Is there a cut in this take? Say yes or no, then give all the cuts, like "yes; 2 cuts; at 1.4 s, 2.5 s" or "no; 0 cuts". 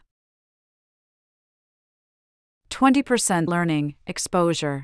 yes; 1 cut; at 3.5 s